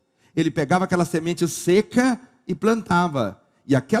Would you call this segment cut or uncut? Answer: uncut